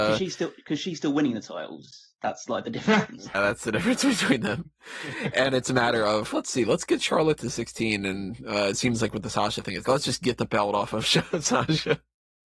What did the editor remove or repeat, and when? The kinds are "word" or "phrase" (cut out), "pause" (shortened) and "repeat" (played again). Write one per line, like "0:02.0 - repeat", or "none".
0:03.3 - word
0:06.3 - word
0:09.8 - word